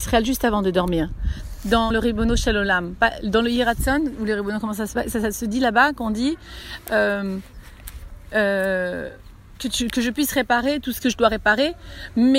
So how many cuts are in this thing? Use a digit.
2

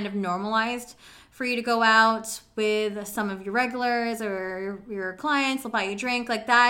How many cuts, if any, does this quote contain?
0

